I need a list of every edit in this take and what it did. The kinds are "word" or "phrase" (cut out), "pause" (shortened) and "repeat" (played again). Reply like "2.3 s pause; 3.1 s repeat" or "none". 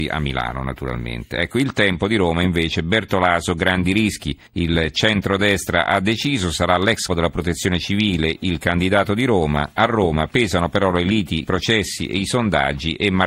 4.5 s pause; 7.1 s word; 11.5 s word